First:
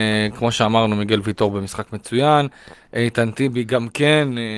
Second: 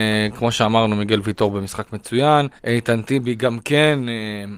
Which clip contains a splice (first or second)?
second